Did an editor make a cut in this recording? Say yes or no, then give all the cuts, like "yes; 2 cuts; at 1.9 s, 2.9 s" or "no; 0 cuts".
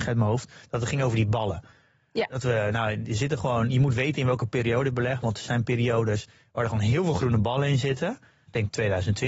no; 0 cuts